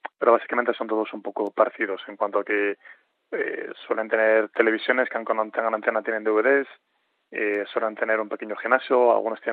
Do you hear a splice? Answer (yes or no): no